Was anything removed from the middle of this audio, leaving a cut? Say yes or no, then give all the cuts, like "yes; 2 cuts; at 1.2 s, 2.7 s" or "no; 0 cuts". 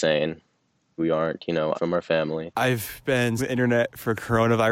yes; 3 cuts; at 1.0 s, 1.7 s, 3.4 s